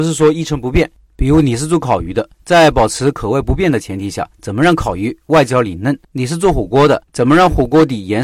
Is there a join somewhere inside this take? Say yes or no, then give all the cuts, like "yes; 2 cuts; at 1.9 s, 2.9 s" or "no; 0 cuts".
yes; 4 cuts; at 2.3 s, 4.3 s, 6.0 s, 7.1 s